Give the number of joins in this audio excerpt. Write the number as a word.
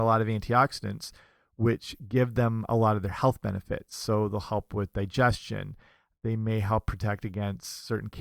zero